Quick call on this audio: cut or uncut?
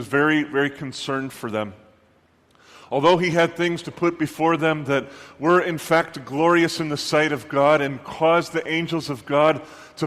uncut